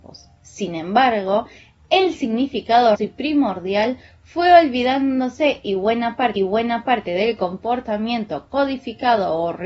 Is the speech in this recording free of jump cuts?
no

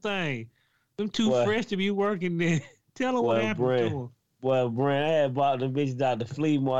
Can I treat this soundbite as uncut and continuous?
yes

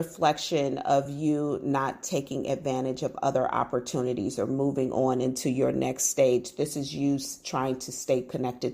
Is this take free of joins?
yes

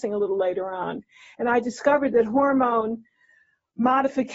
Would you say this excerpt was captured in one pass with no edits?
yes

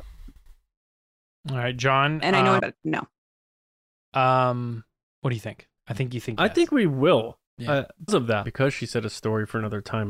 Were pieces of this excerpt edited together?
yes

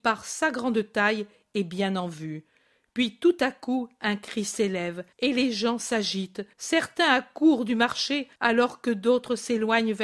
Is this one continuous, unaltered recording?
no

